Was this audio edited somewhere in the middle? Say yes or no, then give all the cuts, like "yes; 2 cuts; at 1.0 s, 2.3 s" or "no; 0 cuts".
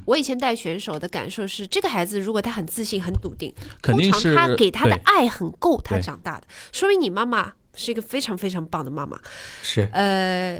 no; 0 cuts